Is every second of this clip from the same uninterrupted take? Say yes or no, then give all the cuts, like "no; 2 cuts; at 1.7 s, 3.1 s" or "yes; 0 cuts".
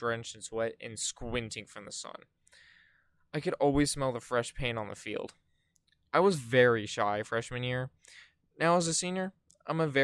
yes; 0 cuts